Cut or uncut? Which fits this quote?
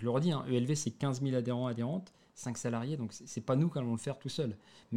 uncut